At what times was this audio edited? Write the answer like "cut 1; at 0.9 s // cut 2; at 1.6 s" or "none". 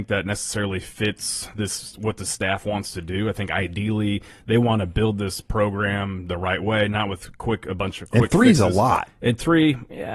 none